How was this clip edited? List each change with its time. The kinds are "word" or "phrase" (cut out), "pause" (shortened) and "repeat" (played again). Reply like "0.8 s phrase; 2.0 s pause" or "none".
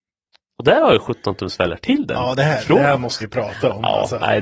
3.2 s word